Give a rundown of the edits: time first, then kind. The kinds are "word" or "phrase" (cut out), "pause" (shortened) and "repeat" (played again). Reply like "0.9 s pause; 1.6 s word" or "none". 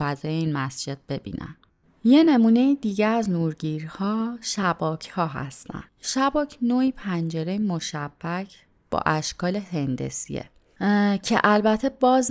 1.7 s pause; 5.9 s pause